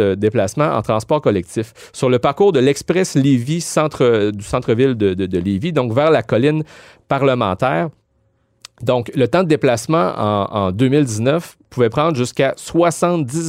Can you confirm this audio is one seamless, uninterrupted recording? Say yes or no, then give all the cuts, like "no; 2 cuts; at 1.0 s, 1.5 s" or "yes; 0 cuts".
yes; 0 cuts